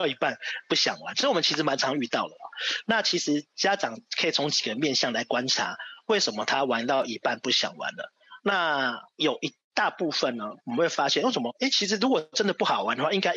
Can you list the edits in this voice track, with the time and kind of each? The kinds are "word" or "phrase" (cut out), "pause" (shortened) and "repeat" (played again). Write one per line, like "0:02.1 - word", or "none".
0:10.6 - pause